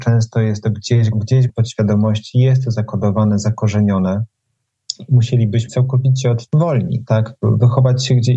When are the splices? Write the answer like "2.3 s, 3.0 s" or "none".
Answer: 1.1 s, 1.5 s, 5.7 s, 6.5 s